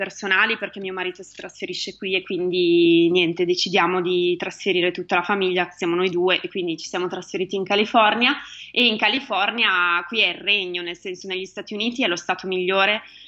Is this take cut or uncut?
uncut